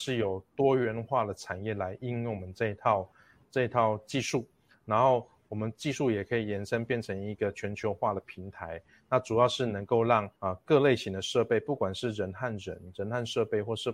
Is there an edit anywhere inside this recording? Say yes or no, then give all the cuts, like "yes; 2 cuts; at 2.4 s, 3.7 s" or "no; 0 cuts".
yes; 1 cut; at 10.4 s